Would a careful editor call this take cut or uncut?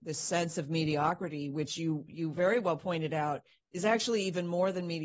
uncut